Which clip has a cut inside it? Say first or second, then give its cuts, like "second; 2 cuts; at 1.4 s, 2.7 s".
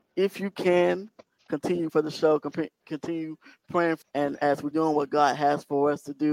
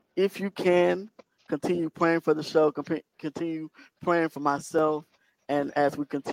first; 3 cuts; at 1.9 s, 4.0 s, 4.7 s